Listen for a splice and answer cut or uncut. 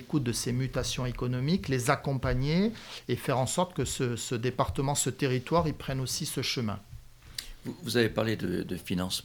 uncut